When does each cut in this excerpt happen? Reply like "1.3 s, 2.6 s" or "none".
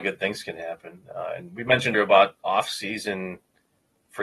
1.9 s, 2.4 s